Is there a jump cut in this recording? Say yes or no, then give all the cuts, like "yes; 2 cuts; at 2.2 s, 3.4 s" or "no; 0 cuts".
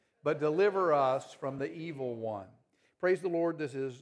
no; 0 cuts